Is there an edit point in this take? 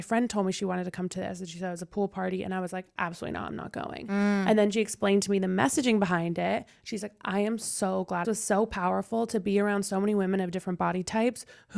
yes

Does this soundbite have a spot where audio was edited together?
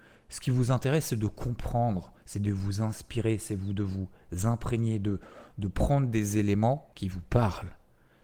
yes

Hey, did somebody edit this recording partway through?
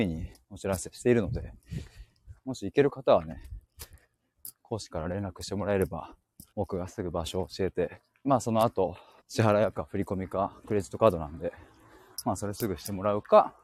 yes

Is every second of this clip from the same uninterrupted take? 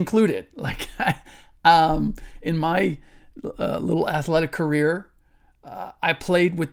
yes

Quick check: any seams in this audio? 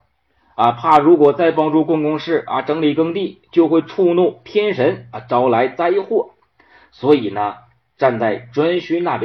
no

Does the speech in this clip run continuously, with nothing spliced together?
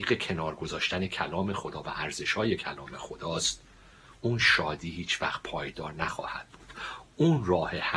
yes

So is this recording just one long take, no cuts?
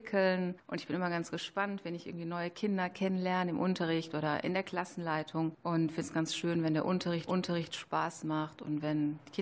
no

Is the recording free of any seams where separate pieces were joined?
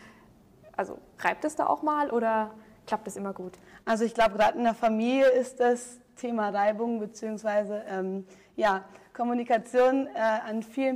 yes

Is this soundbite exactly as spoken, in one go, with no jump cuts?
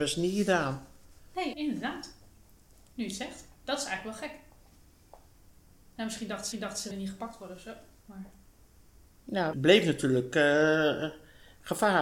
no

